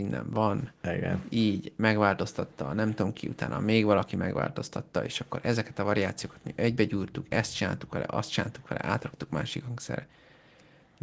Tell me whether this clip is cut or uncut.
uncut